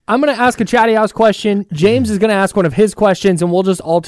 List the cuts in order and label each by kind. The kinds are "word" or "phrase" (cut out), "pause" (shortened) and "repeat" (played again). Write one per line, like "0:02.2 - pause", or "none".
none